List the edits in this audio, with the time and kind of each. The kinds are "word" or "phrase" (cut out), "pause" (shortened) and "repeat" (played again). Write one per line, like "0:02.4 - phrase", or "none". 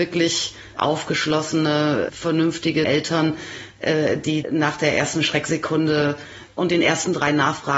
0:02.8 - phrase
0:04.4 - word